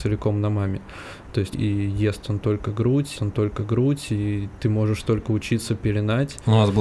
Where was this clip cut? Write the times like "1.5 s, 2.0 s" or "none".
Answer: 1.5 s, 3.2 s